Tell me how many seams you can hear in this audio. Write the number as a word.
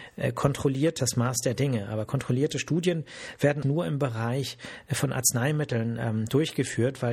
two